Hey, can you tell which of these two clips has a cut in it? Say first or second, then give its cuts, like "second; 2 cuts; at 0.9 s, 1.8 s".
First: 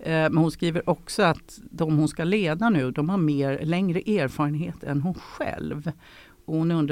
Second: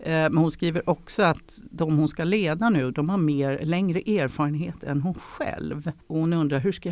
second; 1 cut; at 6.0 s